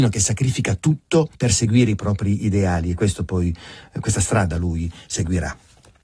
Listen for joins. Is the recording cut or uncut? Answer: cut